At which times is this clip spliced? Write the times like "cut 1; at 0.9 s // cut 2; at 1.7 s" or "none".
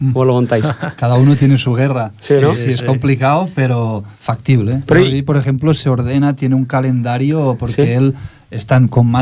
cut 1; at 2.5 s // cut 2; at 4.1 s